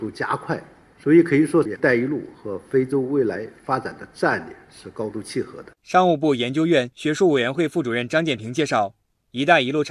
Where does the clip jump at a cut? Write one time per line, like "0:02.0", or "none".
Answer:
0:05.8